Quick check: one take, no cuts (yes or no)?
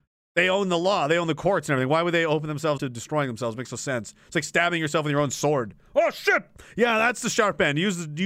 no